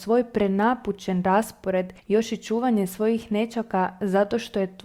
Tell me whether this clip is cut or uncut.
cut